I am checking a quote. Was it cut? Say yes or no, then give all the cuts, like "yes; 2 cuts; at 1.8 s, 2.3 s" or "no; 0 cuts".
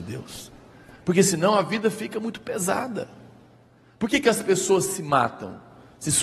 no; 0 cuts